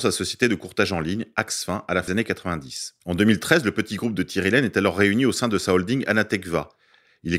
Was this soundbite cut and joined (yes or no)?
yes